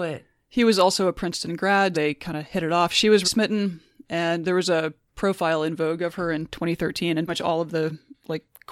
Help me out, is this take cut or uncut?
cut